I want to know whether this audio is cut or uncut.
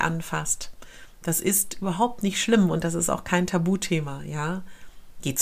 uncut